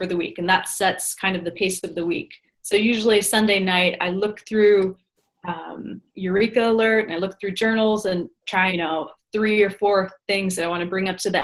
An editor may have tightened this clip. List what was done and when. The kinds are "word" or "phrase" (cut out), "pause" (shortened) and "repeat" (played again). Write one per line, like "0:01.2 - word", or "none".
0:06.1 - pause
0:08.7 - phrase